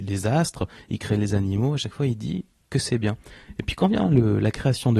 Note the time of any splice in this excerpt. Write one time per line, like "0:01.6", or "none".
none

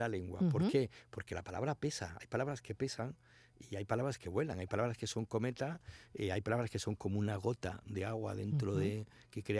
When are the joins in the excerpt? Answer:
none

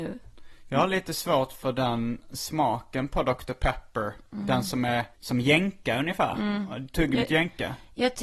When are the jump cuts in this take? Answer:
0:05.1

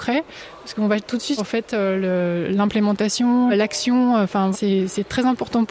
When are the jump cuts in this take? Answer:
0:01.4
0:03.5
0:04.5

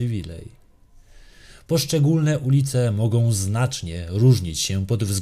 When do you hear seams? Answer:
none

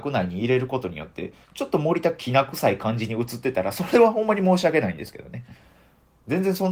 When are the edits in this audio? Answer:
0:01.4

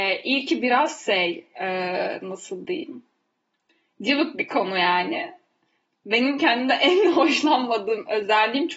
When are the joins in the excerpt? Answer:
none

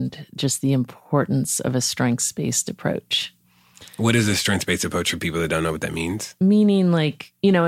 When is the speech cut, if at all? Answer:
none

